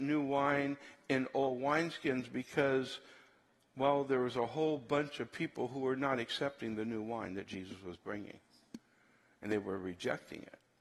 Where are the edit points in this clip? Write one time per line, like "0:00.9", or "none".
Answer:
none